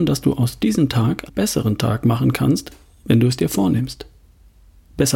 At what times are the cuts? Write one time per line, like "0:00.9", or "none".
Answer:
0:01.3